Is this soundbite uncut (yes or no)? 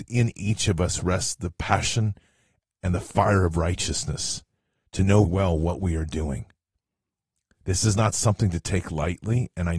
no